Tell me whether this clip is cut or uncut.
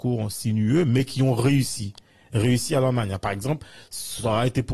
uncut